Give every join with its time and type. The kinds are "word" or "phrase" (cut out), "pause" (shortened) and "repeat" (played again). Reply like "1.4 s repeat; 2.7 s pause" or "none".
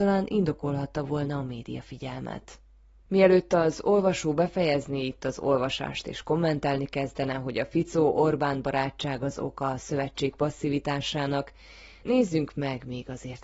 none